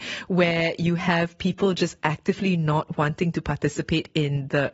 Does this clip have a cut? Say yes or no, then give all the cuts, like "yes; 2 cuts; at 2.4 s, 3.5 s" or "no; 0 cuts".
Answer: no; 0 cuts